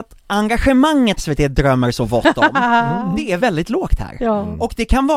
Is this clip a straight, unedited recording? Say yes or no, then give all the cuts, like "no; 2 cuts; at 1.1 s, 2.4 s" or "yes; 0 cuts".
no; 2 cuts; at 1.2 s, 3.4 s